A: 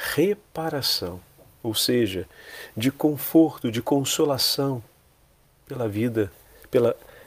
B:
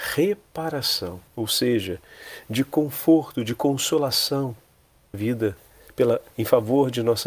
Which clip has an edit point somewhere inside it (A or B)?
B